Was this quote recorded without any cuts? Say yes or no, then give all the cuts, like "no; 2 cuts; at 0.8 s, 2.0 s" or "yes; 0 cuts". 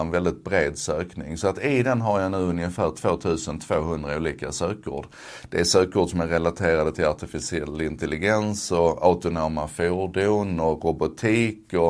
yes; 0 cuts